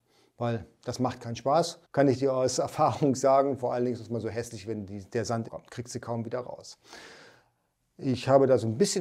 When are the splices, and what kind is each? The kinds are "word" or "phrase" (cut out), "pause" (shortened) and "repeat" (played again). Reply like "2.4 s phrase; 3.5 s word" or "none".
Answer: 1.8 s pause; 5.5 s phrase

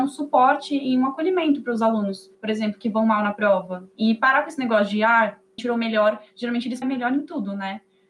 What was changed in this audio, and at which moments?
2.3 s pause; 3.9 s pause; 5.6 s word; 6.8 s phrase

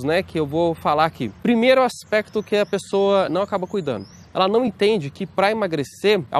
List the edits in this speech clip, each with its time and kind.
none

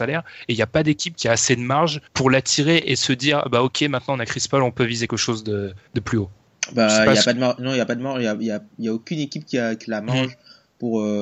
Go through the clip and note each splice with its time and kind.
2.1 s pause; 5.1 s word; 5.9 s pause; 9.8 s phrase

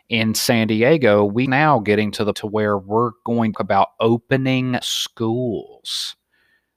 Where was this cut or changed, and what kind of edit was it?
1.5 s phrase; 2.3 s word; 3.5 s phrase; 4.8 s word

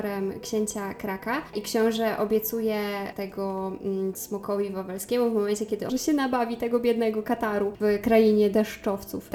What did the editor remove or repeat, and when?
4.1 s word; 5.9 s phrase

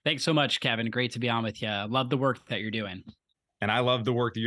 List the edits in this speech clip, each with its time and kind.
none

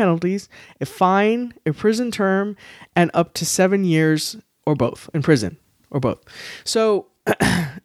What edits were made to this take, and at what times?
none

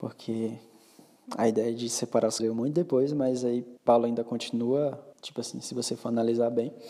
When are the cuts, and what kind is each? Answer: 2.4 s word; 3.8 s pause; 5.1 s pause

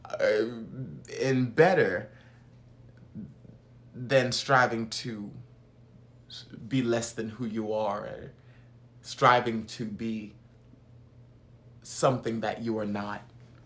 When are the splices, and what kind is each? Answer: 11.8 s pause

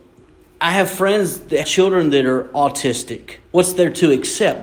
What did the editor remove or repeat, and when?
1.6 s word; 3.4 s pause

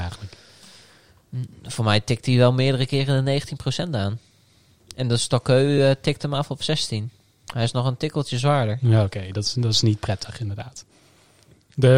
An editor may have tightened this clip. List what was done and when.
none

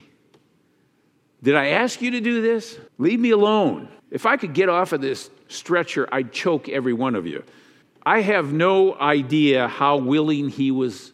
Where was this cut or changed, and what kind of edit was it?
2.9 s pause; 4.0 s pause; 7.8 s pause

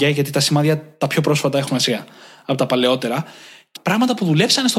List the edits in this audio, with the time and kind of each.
1.7 s word; 3.8 s word

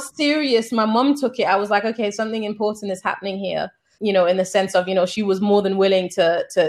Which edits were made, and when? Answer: 4.0 s word

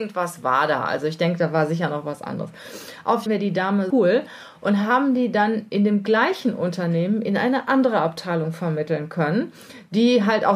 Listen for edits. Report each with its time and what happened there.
3.3 s phrase; 3.9 s word

